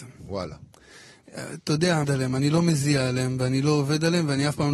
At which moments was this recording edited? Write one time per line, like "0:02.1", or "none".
0:02.0